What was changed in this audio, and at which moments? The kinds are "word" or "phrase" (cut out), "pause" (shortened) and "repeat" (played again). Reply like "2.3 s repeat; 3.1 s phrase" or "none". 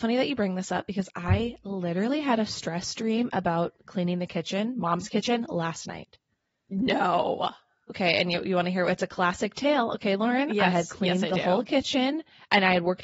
none